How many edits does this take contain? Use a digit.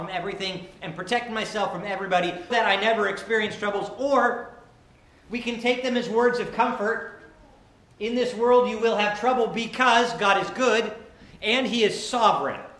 1